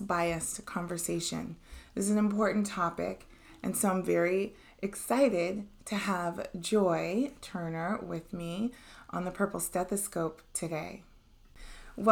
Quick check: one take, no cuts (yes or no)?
yes